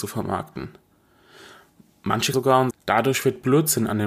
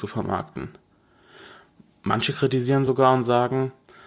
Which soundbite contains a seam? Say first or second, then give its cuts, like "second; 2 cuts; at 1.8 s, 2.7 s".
first; 2 cuts; at 2.3 s, 2.7 s